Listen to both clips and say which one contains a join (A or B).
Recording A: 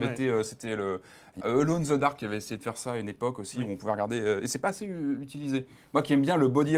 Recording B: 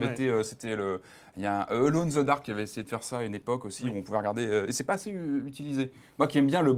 A